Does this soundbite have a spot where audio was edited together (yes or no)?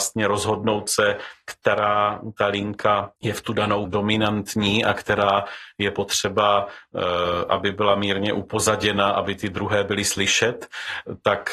yes